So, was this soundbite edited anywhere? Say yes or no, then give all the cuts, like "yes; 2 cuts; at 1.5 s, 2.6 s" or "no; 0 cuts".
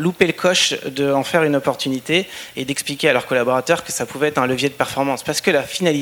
no; 0 cuts